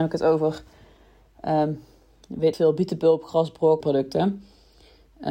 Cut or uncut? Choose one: cut